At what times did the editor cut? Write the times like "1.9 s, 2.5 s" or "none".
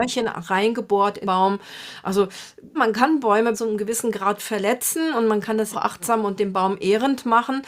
1.2 s, 2.7 s, 3.5 s, 5.7 s